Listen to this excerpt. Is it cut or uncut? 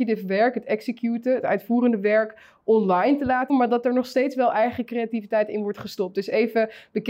cut